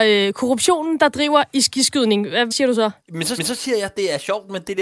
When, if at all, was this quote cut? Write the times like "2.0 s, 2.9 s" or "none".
2.5 s, 3.0 s, 3.4 s